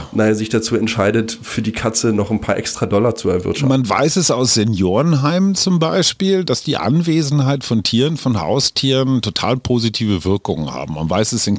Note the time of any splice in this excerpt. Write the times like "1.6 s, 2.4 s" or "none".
none